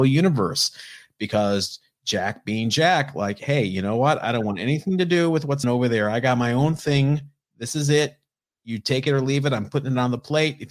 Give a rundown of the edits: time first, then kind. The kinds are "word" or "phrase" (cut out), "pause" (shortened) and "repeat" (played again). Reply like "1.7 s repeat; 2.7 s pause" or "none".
5.6 s word